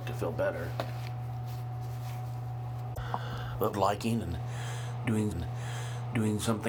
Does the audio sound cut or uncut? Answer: cut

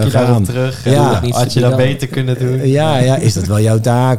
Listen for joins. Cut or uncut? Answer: uncut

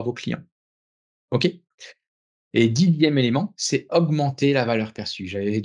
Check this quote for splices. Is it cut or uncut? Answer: uncut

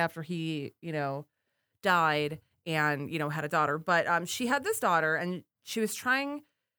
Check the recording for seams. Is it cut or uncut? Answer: uncut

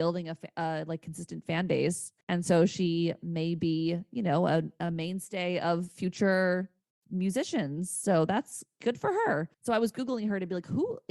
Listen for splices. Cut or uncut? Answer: cut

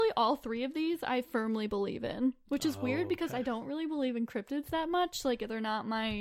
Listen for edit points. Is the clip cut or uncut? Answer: uncut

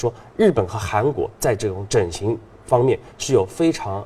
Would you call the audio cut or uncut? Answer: uncut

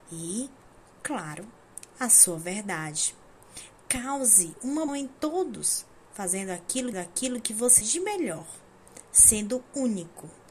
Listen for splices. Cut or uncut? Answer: cut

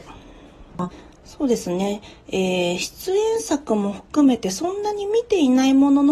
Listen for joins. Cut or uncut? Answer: uncut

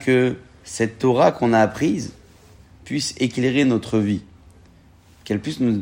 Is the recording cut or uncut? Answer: uncut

